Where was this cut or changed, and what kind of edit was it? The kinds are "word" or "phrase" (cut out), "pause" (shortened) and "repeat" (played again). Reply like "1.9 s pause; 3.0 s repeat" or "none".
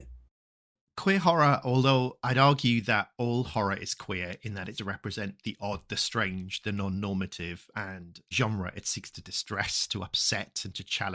4.7 s word; 8.3 s phrase